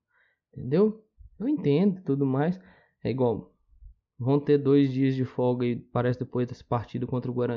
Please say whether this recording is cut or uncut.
uncut